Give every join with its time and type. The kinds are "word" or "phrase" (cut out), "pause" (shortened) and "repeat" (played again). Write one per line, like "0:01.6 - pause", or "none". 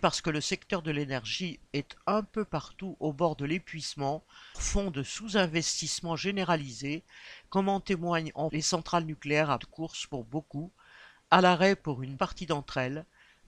0:04.5 - word
0:08.5 - word
0:09.6 - word
0:12.2 - word